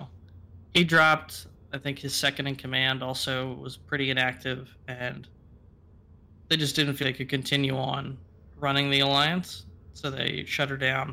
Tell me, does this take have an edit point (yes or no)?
yes